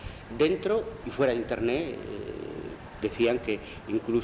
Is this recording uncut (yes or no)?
no